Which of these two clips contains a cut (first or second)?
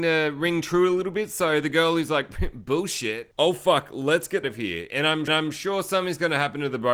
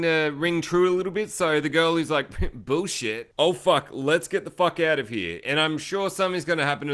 first